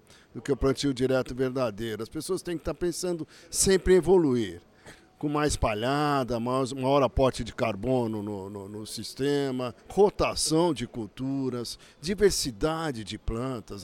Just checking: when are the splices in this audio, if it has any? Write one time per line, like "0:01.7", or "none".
0:09.8